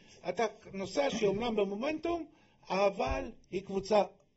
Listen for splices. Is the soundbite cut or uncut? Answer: cut